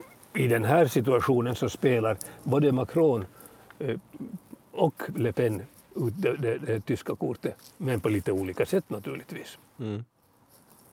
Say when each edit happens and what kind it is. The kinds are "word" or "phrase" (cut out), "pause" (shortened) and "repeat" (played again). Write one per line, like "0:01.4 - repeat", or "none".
none